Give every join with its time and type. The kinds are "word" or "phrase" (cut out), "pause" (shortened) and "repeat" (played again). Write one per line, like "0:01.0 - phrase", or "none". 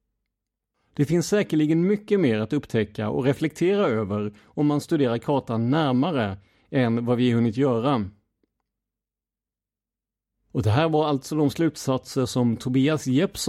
none